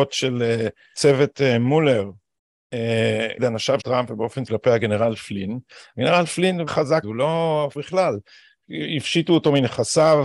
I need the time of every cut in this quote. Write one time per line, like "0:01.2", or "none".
0:00.9
0:03.4
0:03.8
0:04.5
0:06.7
0:07.0
0:07.8